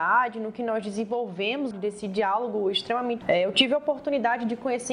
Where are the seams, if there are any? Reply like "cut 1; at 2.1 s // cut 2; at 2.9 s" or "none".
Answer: cut 1; at 1.7 s // cut 2; at 3.2 s